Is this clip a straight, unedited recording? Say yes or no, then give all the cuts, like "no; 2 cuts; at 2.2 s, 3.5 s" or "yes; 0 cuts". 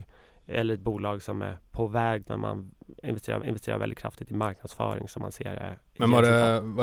no; 3 cuts; at 2.2 s, 3.4 s, 5.8 s